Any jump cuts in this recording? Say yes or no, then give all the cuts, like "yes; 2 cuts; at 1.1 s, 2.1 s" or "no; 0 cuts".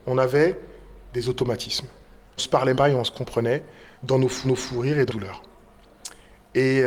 yes; 5 cuts; at 2.4 s, 2.7 s, 4.0 s, 4.4 s, 5.1 s